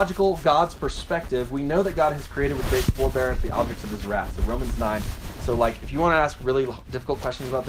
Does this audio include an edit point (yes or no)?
no